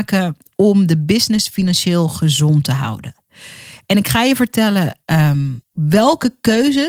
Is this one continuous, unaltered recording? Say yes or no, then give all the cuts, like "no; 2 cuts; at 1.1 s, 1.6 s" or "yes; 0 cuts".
no; 1 cut; at 5.6 s